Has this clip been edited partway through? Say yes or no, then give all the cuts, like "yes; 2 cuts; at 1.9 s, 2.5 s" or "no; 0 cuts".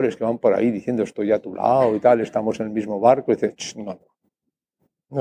no; 0 cuts